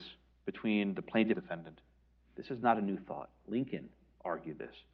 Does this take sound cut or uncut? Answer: cut